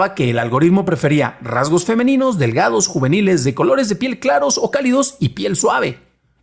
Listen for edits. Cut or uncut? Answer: uncut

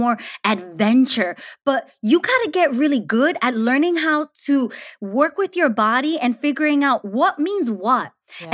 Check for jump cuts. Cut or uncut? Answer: uncut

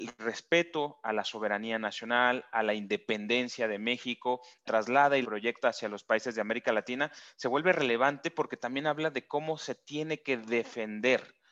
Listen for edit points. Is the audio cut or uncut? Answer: cut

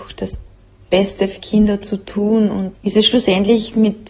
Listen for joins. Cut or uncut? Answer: cut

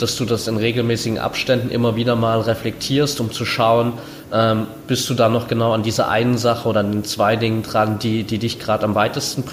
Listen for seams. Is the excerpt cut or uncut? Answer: uncut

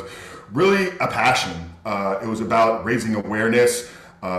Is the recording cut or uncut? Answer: uncut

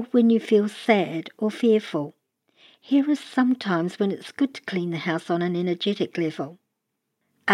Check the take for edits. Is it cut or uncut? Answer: uncut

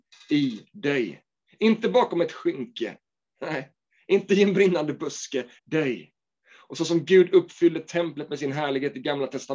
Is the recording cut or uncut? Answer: cut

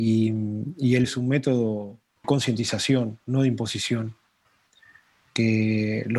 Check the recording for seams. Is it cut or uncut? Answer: cut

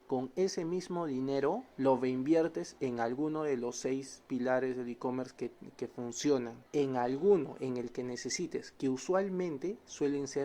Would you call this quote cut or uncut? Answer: cut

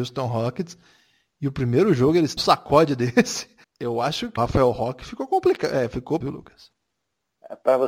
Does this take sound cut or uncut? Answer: cut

